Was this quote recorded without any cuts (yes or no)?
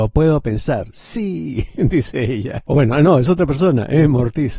yes